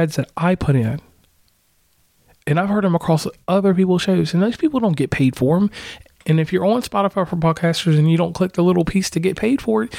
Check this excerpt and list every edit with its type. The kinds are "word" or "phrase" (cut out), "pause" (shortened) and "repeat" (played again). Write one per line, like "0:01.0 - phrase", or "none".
none